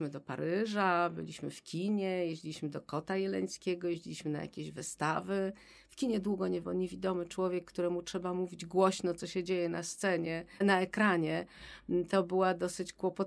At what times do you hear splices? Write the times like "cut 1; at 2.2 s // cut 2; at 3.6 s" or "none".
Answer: cut 1; at 6.6 s // cut 2; at 10.6 s